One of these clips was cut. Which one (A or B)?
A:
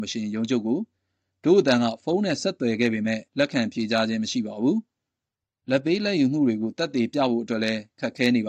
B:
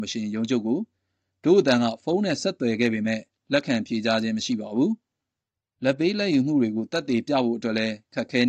A